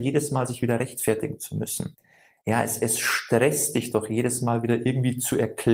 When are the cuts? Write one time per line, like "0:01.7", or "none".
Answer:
none